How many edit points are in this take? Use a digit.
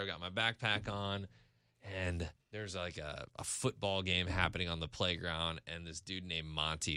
2